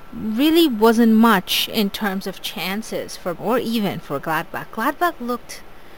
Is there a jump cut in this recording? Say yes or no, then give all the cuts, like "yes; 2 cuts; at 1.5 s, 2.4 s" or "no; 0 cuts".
yes; 1 cut; at 3.4 s